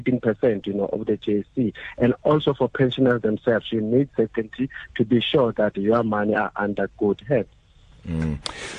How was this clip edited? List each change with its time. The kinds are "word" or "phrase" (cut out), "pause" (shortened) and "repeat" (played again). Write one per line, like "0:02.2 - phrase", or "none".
none